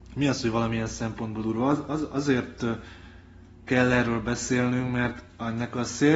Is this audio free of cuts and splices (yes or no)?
yes